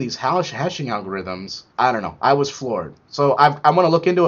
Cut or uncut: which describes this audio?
cut